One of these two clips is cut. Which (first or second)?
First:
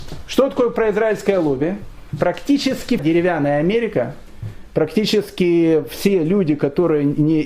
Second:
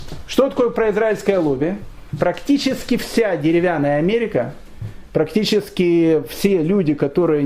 first